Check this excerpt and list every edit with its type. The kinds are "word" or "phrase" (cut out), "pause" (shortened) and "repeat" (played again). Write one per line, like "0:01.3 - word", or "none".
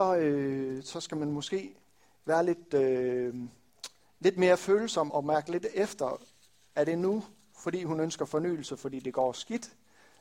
0:05.1 - word